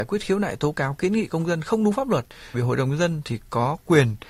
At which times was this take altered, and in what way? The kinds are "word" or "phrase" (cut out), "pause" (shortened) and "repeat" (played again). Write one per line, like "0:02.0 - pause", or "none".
0:02.5 - word

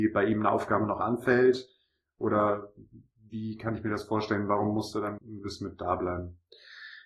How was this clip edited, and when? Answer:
0:05.2 - word

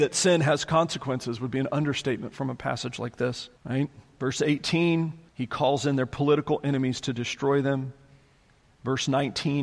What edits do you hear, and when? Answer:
0:03.6 - pause
0:05.3 - pause

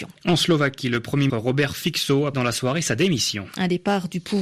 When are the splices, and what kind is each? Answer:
0:01.3 - word
0:02.3 - word

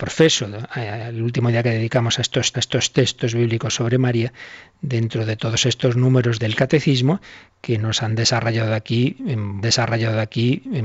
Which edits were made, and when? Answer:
0:02.5 - repeat
0:06.4 - word
0:09.6 - repeat

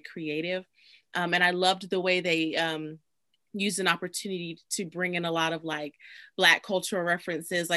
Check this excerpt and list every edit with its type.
none

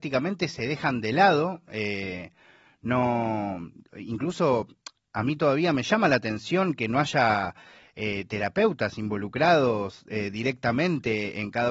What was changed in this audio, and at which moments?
none

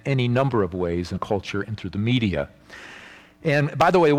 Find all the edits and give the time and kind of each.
0:01.2 - word

